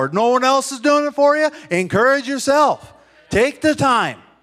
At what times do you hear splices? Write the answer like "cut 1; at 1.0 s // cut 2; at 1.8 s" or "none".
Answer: none